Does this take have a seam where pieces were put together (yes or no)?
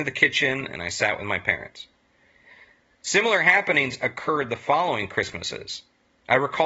no